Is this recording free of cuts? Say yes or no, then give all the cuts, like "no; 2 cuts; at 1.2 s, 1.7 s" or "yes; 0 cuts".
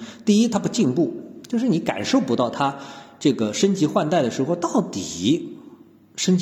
yes; 0 cuts